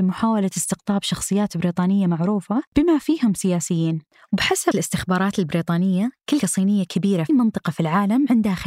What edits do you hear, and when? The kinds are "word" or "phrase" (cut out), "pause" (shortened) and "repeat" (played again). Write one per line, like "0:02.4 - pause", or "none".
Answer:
0:04.7 - word
0:06.4 - word
0:07.3 - word